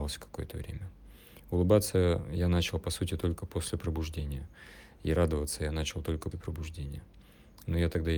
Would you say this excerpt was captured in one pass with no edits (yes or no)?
no